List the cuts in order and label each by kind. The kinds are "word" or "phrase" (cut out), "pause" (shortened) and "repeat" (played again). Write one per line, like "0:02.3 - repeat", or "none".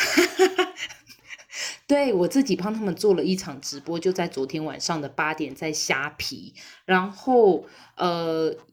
none